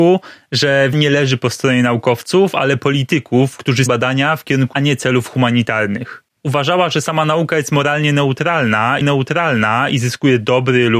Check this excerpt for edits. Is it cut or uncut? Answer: cut